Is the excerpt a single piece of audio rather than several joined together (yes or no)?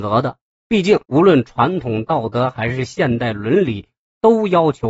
no